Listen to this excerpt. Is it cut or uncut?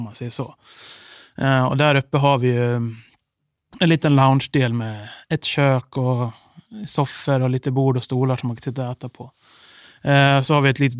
uncut